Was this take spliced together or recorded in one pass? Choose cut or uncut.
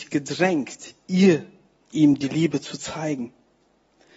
cut